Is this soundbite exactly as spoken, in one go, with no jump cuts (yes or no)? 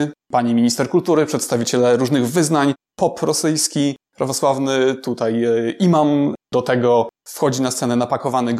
yes